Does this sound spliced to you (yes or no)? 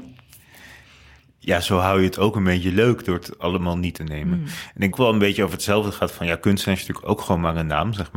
yes